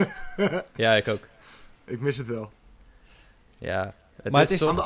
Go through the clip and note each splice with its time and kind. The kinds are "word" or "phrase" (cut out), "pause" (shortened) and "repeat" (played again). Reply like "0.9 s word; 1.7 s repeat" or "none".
none